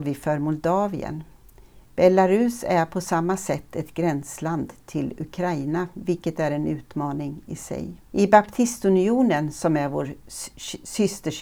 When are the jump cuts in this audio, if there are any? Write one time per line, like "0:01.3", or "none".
0:01.9
0:08.0